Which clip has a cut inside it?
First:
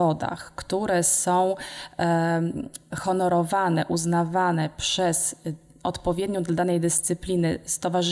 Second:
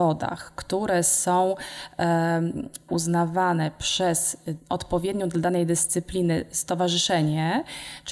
second; 2 cuts; at 2.9 s, 4.6 s

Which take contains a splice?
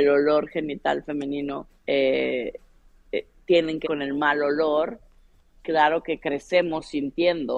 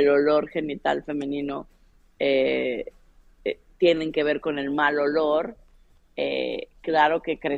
first; 3 cuts; at 1.8 s, 3.8 s, 5.5 s

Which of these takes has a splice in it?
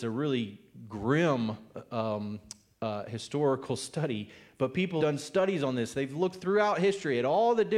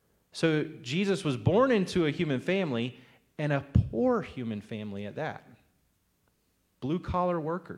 first; 1 cut; at 5.0 s

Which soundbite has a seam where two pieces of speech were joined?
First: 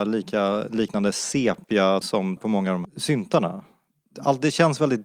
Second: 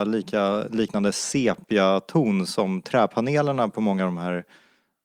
first; 3 cuts; at 2.0 s, 2.4 s, 2.8 s

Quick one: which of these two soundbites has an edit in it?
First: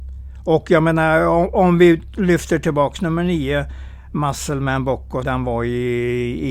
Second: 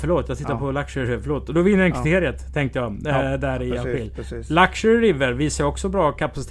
first; 1 cut; at 5.2 s

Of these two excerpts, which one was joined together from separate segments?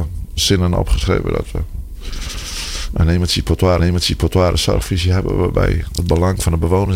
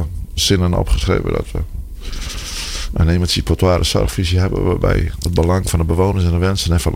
first; 1 cut; at 3.8 s

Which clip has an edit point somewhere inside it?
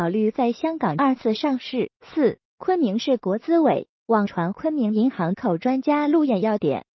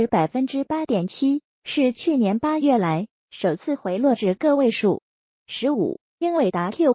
first; 1 cut; at 1.9 s

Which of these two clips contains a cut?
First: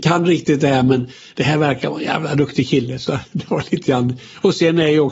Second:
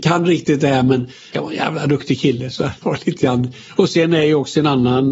second; 2 cuts; at 1.3 s, 2.8 s

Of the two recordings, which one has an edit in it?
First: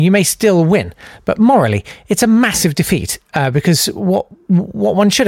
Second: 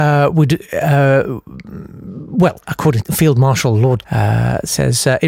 second; 2 cuts; at 3.0 s, 4.0 s

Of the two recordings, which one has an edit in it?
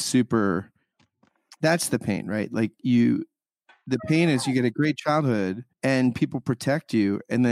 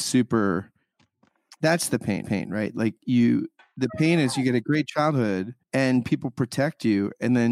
second; 2 cuts; at 2.2 s, 3.6 s

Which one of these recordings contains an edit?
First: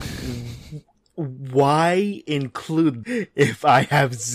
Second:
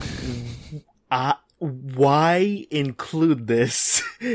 first; 2 cuts; at 1.0 s, 3.0 s

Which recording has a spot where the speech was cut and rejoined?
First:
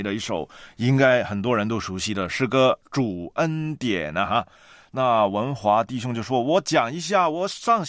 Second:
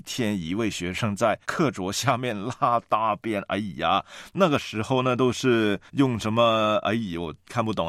second; 2 cuts; at 1.4 s, 5.9 s

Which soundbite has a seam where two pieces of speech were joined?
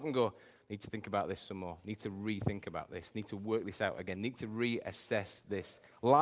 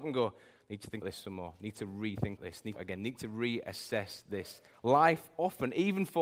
second; 3 cuts; at 1.0 s, 2.4 s, 2.8 s

